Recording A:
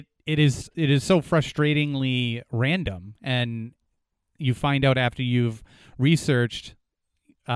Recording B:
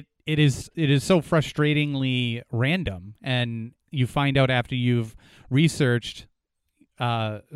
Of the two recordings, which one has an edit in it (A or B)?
B